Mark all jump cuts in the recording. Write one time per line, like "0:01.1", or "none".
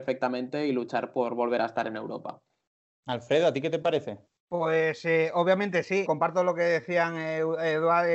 0:04.3
0:06.1